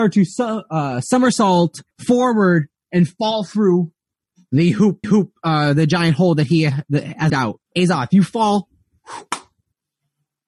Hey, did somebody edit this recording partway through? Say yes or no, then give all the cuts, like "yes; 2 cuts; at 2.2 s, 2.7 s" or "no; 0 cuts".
yes; 4 cuts; at 1.9 s, 5.0 s, 7.3 s, 7.7 s